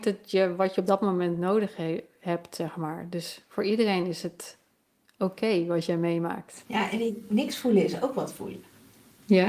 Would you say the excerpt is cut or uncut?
uncut